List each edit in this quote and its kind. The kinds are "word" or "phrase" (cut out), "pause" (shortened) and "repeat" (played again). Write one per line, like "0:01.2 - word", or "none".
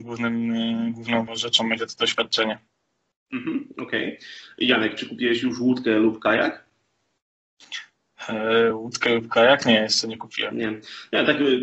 0:01.3 - word

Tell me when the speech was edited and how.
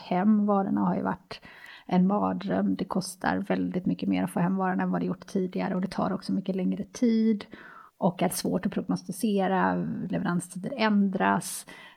0:07.9 - pause

